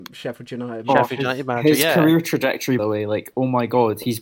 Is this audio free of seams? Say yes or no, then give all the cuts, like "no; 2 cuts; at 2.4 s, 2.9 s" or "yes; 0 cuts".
no; 1 cut; at 2.8 s